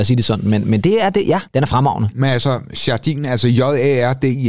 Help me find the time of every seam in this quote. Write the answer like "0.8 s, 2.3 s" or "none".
1.5 s